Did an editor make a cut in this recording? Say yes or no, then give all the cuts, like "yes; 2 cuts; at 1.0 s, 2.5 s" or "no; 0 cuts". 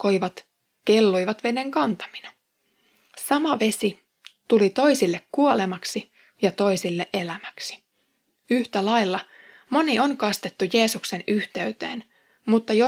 no; 0 cuts